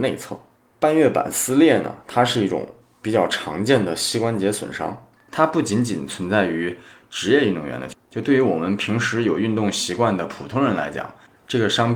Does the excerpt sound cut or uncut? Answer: uncut